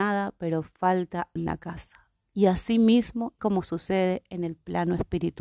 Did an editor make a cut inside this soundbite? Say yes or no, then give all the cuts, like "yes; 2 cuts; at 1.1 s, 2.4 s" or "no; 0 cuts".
yes; 2 cuts; at 1.4 s, 3.4 s